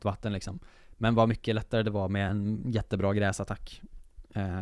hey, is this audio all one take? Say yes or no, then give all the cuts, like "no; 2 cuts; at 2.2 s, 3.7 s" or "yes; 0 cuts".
yes; 0 cuts